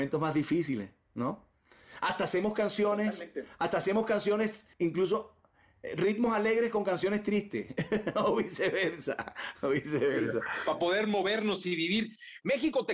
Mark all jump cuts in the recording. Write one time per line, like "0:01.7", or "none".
0:04.7